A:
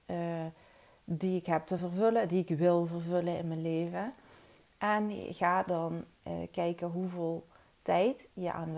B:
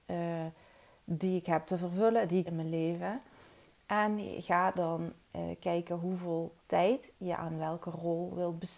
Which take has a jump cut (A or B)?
B